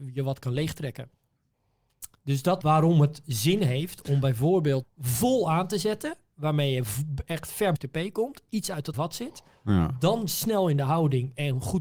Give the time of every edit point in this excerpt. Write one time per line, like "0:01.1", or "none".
0:02.6
0:04.8
0:07.8
0:08.9